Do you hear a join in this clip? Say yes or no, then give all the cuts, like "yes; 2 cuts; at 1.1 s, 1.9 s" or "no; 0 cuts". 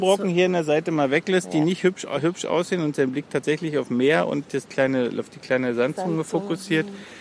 no; 0 cuts